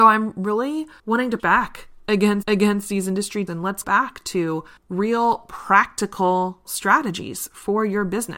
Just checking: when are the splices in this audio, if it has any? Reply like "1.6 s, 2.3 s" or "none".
1.0 s, 1.4 s, 2.4 s, 3.5 s, 3.8 s, 4.8 s, 6.6 s